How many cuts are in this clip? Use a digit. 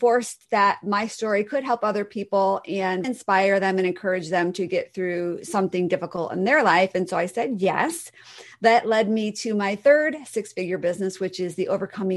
1